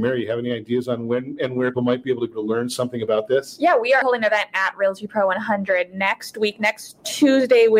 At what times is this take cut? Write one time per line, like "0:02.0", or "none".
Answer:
0:01.7
0:02.3
0:04.0